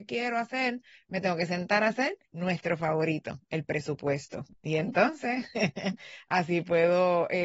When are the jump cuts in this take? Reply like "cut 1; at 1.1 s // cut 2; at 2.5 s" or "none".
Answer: cut 1; at 2.3 s